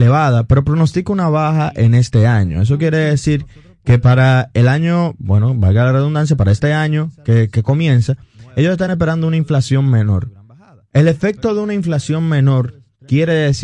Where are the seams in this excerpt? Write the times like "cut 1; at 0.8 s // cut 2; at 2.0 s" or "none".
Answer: none